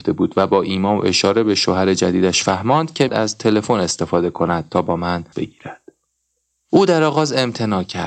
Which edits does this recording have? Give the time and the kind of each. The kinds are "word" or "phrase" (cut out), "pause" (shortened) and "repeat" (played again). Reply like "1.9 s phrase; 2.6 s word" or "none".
3.1 s word; 5.3 s word